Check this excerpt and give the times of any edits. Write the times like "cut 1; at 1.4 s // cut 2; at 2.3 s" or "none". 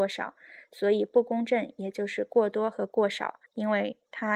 cut 1; at 3.5 s